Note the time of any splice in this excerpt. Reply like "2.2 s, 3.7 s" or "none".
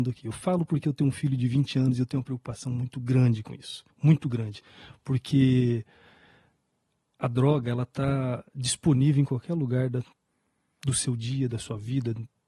3.9 s